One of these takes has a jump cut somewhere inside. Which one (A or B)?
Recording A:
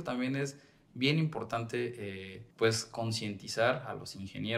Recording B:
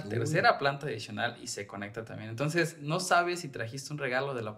A